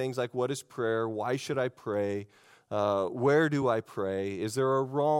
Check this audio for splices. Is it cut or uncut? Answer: uncut